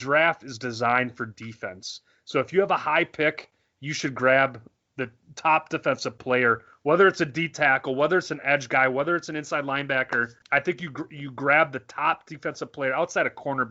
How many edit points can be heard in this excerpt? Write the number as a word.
zero